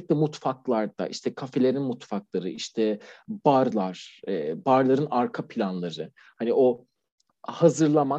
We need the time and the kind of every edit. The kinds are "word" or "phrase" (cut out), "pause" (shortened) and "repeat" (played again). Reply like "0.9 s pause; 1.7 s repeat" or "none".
none